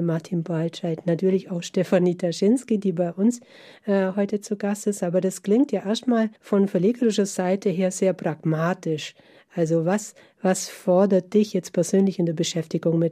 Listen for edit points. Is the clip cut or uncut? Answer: cut